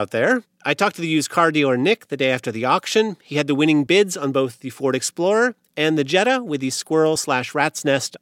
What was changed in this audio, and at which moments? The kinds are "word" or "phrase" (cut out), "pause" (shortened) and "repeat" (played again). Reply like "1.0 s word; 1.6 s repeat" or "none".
none